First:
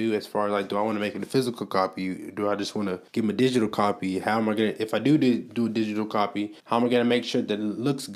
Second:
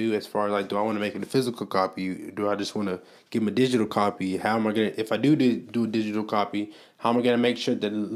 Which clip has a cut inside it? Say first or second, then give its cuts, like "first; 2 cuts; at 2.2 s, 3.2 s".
first; 2 cuts; at 3.1 s, 6.6 s